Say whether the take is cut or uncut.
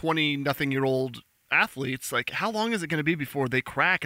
uncut